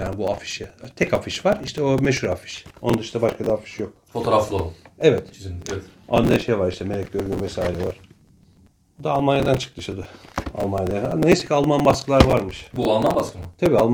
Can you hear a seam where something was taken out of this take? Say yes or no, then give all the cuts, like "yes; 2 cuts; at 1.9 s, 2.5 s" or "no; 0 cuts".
no; 0 cuts